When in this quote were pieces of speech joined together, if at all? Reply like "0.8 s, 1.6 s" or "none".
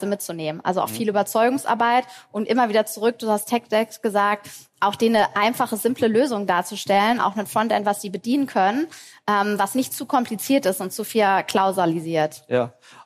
none